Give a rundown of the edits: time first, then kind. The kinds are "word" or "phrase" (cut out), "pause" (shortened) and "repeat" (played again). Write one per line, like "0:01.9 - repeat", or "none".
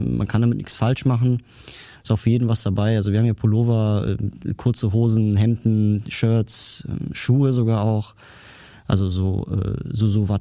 none